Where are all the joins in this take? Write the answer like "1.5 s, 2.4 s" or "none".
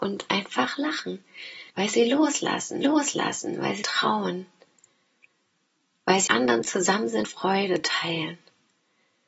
1.7 s, 2.8 s, 3.8 s, 6.3 s, 7.2 s